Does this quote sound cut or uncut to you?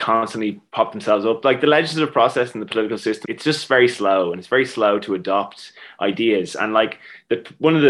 cut